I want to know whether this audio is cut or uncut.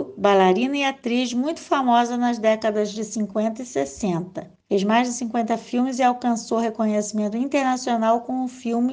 cut